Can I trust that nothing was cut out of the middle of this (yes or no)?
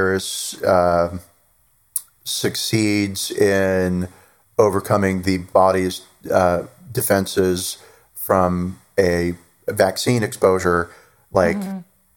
yes